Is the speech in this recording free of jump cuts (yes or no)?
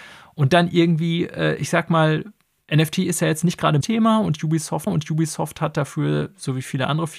no